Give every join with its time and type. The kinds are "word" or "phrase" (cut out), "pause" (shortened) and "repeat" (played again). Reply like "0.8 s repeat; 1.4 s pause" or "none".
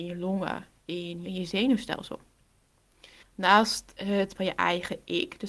1.3 s phrase; 3.2 s pause; 4.4 s word